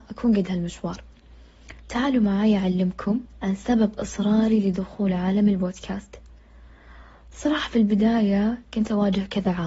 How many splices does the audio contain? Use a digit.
1